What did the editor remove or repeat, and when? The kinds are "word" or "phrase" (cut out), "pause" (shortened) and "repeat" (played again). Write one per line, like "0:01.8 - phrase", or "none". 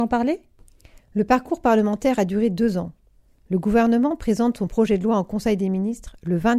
none